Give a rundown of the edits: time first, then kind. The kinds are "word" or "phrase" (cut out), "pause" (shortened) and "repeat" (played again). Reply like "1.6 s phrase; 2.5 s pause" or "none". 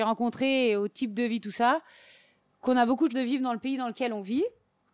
3.1 s word